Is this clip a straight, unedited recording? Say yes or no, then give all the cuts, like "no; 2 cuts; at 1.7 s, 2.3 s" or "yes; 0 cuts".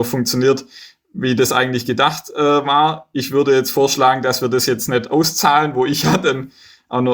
yes; 0 cuts